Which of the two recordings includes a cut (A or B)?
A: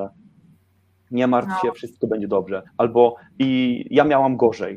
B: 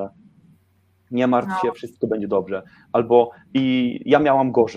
A